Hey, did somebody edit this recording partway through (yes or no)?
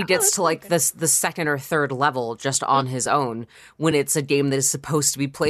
no